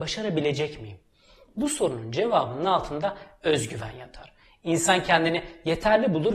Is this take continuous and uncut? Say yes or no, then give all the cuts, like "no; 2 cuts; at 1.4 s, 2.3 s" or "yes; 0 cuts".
yes; 0 cuts